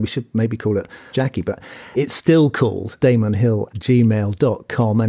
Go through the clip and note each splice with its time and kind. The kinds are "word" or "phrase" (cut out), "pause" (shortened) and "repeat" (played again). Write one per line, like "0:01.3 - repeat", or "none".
0:01.1 - word
0:01.9 - word
0:03.0 - word
0:03.7 - word